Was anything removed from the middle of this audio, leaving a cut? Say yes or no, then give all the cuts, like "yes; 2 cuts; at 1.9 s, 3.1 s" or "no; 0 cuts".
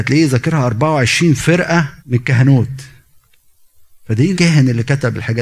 yes; 2 cuts; at 2.0 s, 4.3 s